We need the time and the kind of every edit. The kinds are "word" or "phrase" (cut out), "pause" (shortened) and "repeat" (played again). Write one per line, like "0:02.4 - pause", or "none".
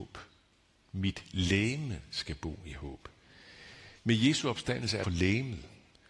0:04.0 - pause
0:05.0 - phrase